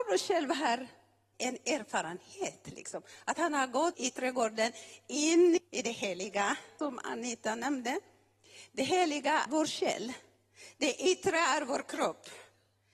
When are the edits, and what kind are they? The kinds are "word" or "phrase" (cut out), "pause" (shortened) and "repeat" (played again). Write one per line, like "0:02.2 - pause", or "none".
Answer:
0:01.3 - word
0:03.9 - word
0:05.6 - word
0:06.8 - word
0:09.5 - word